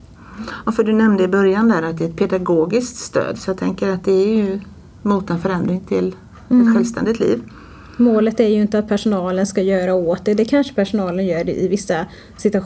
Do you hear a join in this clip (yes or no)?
no